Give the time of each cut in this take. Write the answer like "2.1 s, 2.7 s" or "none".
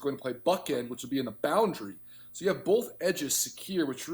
none